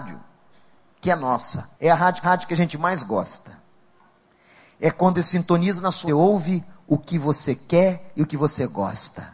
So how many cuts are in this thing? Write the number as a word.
four